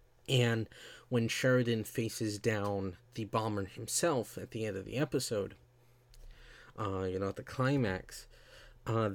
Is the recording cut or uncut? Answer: cut